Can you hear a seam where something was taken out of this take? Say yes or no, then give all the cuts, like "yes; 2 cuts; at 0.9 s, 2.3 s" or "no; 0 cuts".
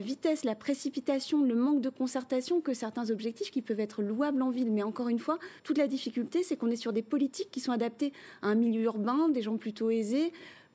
yes; 1 cut; at 5.6 s